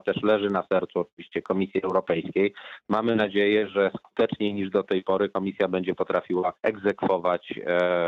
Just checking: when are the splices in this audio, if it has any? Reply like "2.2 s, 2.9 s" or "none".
6.6 s